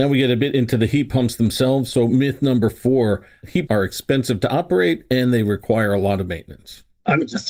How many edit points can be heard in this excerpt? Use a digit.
1